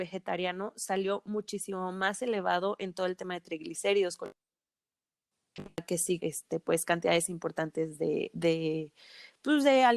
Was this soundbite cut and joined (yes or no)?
yes